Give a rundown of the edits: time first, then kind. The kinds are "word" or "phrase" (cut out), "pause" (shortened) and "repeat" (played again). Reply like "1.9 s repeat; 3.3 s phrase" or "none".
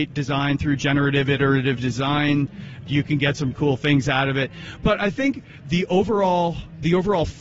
2.9 s word; 3.5 s word